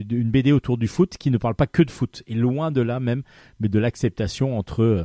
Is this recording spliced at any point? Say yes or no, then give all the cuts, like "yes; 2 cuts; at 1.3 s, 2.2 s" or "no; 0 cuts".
no; 0 cuts